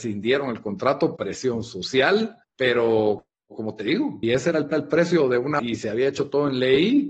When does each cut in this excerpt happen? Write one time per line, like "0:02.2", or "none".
0:01.2
0:02.4
0:04.2
0:04.7
0:05.6